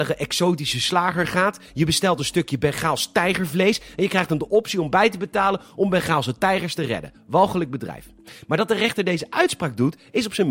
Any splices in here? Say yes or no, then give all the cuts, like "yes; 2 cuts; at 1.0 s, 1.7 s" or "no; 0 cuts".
no; 0 cuts